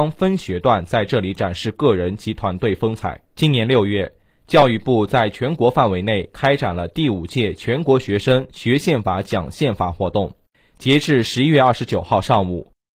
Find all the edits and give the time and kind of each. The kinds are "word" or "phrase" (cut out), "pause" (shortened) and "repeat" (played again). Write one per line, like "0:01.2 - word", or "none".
0:03.2 - pause
0:10.5 - pause